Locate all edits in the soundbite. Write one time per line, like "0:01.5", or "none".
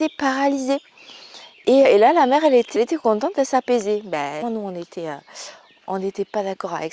0:01.8
0:02.8
0:04.4